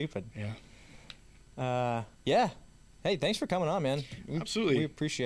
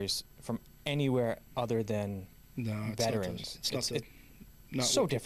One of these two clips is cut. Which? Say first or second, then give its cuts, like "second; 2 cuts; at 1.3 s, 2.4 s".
first; 1 cut; at 2.1 s